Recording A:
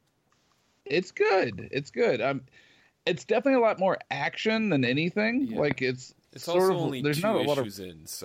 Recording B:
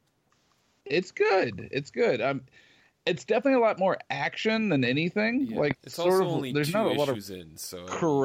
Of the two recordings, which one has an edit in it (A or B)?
B